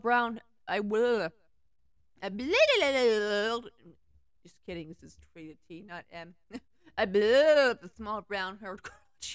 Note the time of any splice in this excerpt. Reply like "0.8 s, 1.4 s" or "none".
none